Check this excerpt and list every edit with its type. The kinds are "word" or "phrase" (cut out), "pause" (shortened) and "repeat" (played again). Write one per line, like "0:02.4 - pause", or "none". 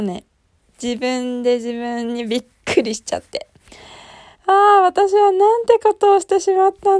0:04.3 - pause

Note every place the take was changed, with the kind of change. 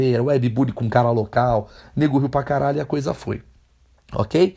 none

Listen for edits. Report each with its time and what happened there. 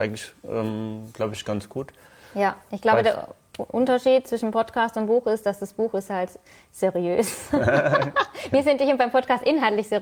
none

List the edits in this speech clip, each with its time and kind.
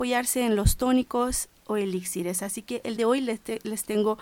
0:03.0 - word

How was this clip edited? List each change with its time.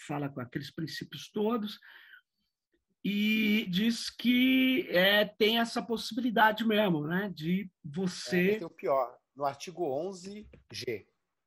0:03.7 - word

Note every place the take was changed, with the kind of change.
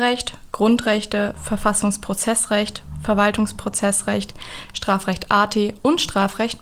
none

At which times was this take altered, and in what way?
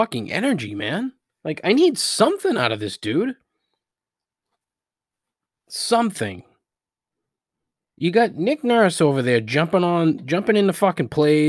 none

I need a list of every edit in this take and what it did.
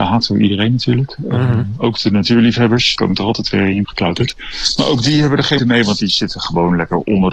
0:02.9 - word
0:03.8 - word
0:05.6 - word

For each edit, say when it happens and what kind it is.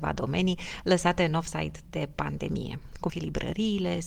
0:03.1 - word

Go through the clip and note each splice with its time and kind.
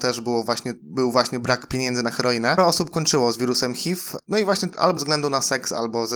0:02.6 - word
0:05.0 - word

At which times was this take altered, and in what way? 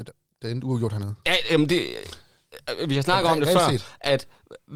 none

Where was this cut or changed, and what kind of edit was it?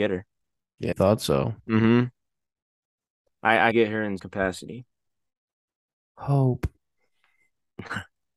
0:00.9 - word
0:01.6 - pause
0:03.7 - phrase
0:04.2 - word
0:05.8 - pause

